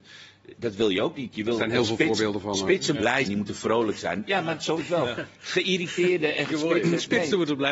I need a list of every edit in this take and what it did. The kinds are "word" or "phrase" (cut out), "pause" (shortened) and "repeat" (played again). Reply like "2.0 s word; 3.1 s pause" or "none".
2.9 s word; 3.2 s word; 4.8 s word; 6.5 s word

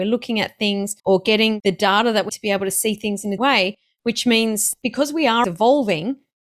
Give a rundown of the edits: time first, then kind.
1.0 s pause; 2.3 s word; 3.4 s word; 5.4 s word

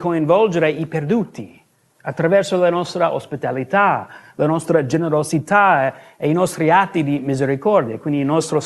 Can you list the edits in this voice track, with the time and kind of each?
none

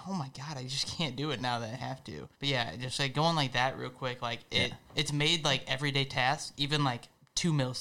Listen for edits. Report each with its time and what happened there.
2.3 s pause; 4.8 s pause

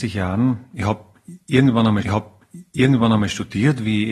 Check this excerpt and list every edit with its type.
2.0 s repeat

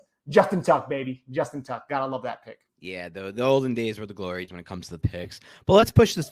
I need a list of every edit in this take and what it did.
2.7 s pause; 4.5 s word; 5.0 s phrase

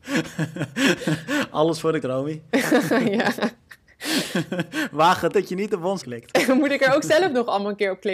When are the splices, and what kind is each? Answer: 2.0 s word; 5.3 s word; 6.0 s word

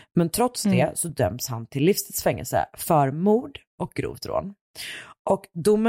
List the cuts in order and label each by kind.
none

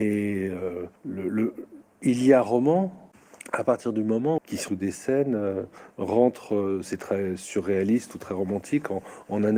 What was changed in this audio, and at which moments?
1.0 s pause; 1.8 s pause; 4.4 s phrase; 4.7 s phrase

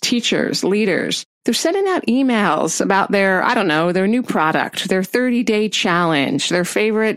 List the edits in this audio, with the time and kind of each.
none

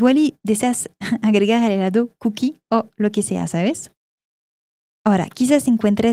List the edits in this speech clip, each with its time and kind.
none

